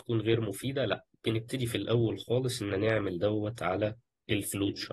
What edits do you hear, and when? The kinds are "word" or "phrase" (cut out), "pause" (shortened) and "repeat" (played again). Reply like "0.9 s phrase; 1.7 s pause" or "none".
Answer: 2.7 s word